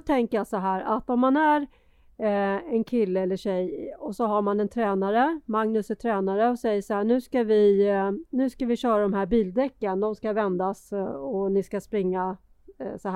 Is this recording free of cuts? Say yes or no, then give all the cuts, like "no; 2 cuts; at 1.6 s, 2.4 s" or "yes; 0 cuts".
yes; 0 cuts